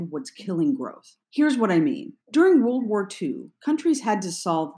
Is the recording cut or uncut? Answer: cut